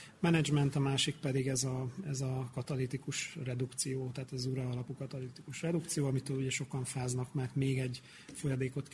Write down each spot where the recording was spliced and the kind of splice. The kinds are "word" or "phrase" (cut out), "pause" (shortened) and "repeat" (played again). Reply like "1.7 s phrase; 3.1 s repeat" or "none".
none